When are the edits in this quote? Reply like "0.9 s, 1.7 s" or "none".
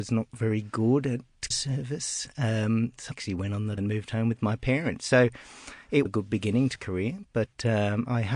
1.5 s, 3.1 s, 3.8 s, 6.1 s, 6.8 s